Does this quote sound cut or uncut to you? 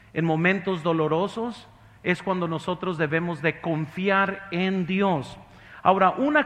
uncut